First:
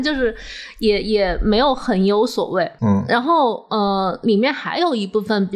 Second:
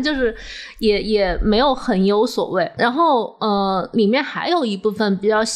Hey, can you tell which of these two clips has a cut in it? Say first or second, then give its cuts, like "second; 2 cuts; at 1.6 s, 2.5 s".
second; 1 cut; at 2.8 s